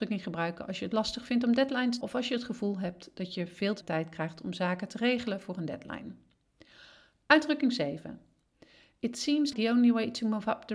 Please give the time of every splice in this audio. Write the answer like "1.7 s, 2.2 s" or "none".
2.0 s, 3.8 s, 9.5 s